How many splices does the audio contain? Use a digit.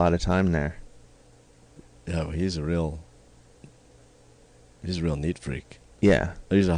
0